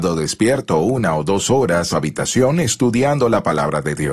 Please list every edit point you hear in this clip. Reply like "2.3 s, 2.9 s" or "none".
1.9 s

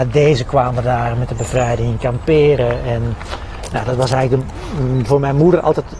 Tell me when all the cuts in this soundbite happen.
none

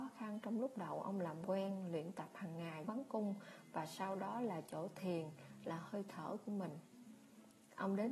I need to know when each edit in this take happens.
2.9 s

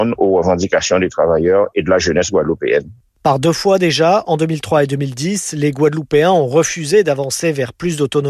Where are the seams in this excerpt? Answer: none

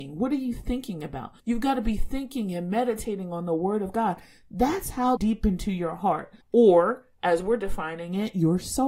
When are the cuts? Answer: 1.4 s, 5.2 s, 6.4 s

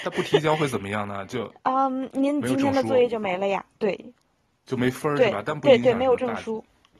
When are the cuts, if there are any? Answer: none

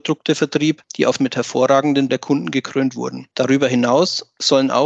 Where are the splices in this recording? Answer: 1.2 s, 2.1 s, 3.3 s

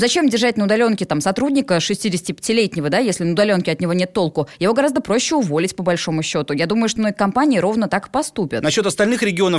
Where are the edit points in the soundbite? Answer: 7.0 s

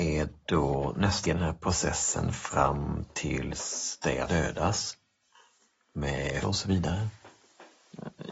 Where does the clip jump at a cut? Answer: 1.2 s, 4.3 s, 6.4 s

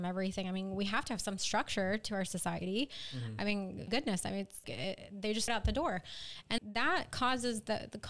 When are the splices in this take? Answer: 3.9 s, 4.6 s, 5.5 s, 6.6 s

